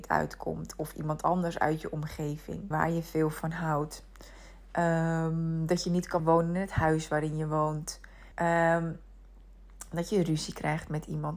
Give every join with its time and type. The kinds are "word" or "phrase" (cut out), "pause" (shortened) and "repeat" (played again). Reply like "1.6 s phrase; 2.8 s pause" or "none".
2.7 s word; 6.2 s word; 8.3 s pause